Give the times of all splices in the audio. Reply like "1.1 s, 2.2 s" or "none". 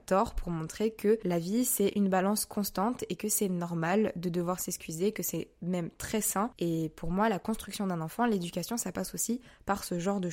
none